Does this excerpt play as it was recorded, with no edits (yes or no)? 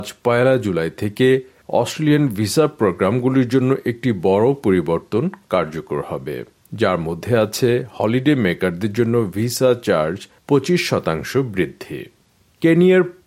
yes